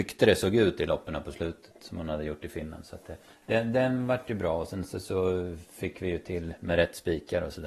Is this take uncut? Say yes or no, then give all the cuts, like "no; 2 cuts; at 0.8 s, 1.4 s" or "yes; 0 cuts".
no; 1 cut; at 3.3 s